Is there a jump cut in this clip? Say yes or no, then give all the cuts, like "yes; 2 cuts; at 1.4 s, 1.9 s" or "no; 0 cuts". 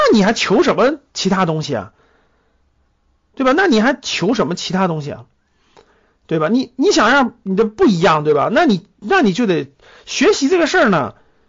no; 0 cuts